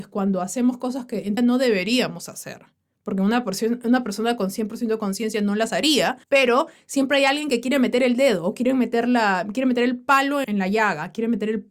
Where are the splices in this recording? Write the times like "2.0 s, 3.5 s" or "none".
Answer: 1.4 s, 6.2 s, 10.4 s